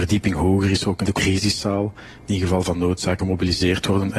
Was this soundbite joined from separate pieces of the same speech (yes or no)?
yes